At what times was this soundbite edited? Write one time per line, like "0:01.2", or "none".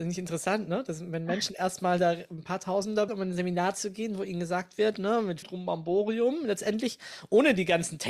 0:03.1
0:05.4